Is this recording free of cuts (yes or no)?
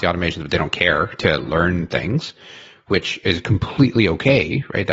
yes